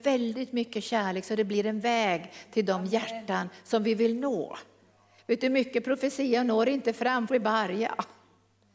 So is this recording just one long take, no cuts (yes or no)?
no